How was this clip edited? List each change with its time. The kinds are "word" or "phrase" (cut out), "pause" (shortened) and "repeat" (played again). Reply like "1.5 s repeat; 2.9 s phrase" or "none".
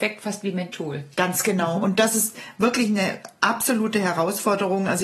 1.1 s pause

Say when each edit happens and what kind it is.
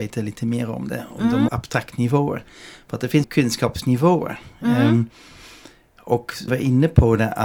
1.5 s word; 3.2 s word; 6.5 s word

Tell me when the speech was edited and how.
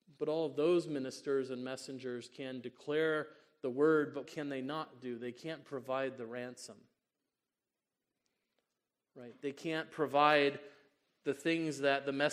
4.2 s word

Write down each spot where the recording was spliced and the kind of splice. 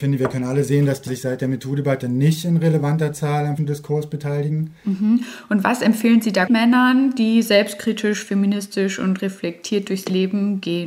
1.1 s word; 3.6 s word; 6.5 s word

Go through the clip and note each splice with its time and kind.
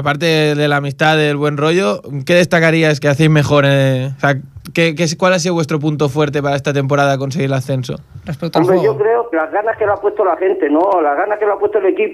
3.0 s word; 9.3 s word

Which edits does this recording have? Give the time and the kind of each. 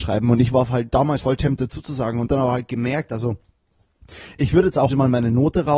1.2 s word; 2.3 s word; 4.9 s word

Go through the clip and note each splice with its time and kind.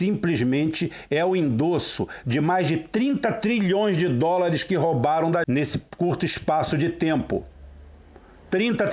5.4 s word

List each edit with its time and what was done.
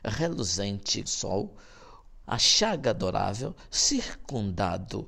1.0 s word; 2.2 s word

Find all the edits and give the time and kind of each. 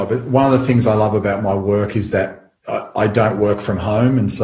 none

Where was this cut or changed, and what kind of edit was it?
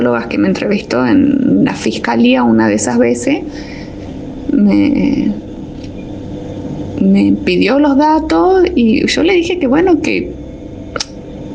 none

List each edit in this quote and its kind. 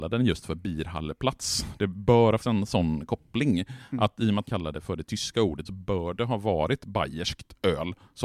2.4 s word; 4.5 s word; 5.7 s word

